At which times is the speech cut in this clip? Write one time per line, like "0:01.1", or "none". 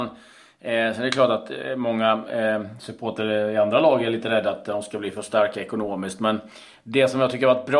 none